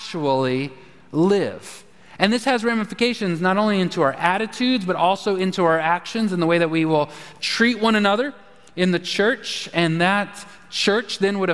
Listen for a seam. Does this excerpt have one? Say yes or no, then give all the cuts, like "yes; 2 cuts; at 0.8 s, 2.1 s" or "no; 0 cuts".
no; 0 cuts